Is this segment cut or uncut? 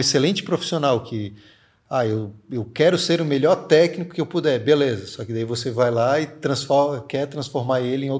uncut